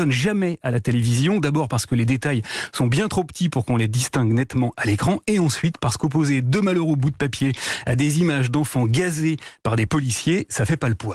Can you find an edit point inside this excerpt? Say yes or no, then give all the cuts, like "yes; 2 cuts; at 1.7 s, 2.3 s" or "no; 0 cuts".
no; 0 cuts